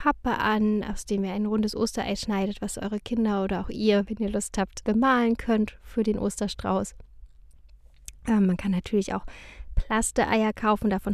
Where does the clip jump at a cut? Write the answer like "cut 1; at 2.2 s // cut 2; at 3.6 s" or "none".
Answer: cut 1; at 4.8 s